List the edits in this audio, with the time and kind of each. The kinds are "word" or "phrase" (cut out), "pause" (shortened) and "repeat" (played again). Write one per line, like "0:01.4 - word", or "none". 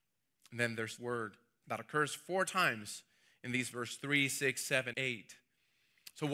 0:01.0 - word
0:01.6 - word
0:03.7 - word
0:04.9 - word